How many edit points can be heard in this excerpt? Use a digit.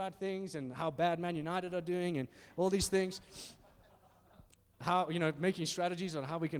0